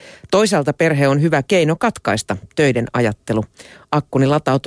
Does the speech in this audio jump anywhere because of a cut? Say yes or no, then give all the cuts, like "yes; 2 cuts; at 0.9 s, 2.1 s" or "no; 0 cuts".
no; 0 cuts